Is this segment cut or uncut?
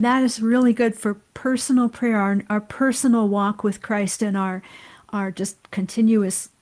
uncut